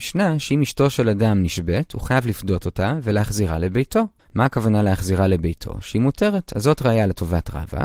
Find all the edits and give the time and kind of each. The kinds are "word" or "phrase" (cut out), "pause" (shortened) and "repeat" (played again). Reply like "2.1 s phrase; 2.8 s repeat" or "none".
none